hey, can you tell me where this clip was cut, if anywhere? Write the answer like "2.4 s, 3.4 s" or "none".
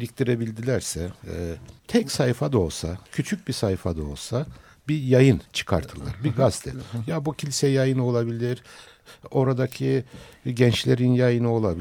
1.8 s, 3.1 s, 5.5 s